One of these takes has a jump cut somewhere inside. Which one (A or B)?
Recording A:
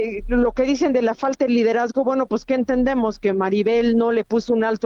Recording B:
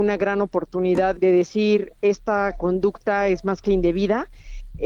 B